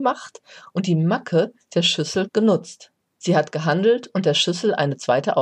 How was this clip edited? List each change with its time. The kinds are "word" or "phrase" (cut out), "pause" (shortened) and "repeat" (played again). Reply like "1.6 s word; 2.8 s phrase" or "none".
2.3 s word